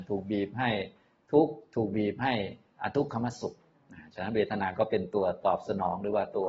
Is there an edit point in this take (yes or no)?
no